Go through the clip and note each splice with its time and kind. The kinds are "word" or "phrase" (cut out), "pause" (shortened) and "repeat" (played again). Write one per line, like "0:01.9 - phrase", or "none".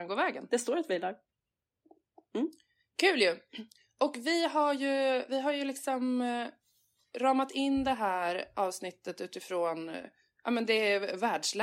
none